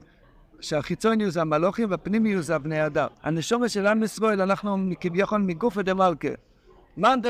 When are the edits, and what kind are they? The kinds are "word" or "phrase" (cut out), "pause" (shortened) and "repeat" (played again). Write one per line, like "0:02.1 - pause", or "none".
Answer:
0:03.1 - pause